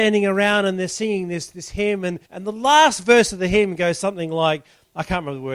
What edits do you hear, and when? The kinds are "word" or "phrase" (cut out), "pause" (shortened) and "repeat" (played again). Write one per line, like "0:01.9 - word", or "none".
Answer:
0:02.2 - pause